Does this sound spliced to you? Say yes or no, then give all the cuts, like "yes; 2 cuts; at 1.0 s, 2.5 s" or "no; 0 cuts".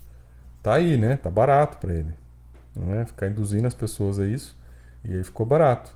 yes; 1 cut; at 5.0 s